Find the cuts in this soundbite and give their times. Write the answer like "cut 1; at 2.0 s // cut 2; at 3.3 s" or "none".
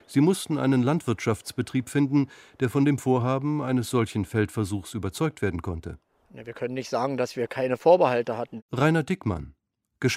none